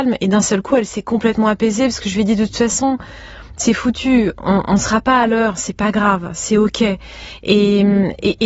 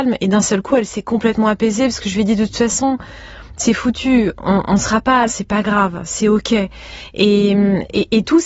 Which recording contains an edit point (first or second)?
second